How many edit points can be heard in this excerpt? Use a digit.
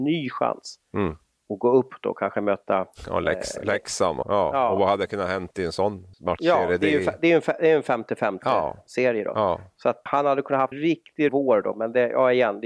5